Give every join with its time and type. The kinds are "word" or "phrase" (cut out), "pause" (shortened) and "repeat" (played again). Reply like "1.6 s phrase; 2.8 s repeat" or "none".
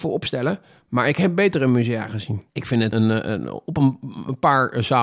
2.5 s pause; 2.9 s word